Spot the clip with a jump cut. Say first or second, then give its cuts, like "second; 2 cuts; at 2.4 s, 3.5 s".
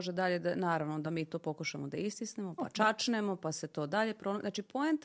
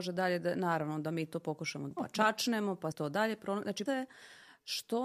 second; 3 cuts; at 1.9 s, 2.9 s, 3.9 s